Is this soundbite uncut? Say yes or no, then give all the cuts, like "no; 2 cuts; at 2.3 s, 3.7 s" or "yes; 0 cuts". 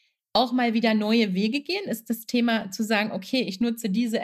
yes; 0 cuts